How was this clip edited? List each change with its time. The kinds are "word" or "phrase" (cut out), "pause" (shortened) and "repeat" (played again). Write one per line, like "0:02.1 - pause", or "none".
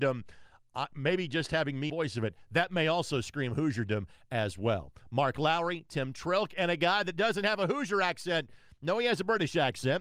0:01.9 - phrase